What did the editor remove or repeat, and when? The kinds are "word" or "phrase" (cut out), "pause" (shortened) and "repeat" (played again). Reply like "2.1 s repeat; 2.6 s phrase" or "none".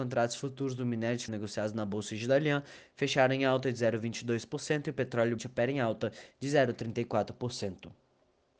1.3 s word; 5.4 s word